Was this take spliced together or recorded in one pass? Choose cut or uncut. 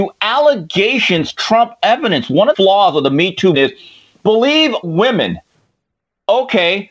cut